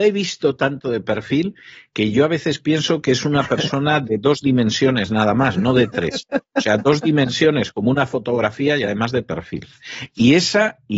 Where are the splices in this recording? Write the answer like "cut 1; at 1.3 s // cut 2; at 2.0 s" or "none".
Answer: none